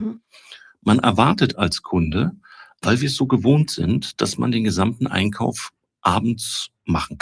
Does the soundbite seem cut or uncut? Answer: uncut